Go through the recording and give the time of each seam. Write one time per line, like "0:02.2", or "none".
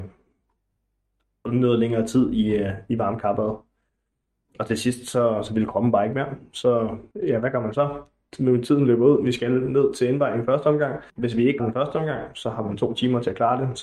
0:07.1
0:11.1
0:11.6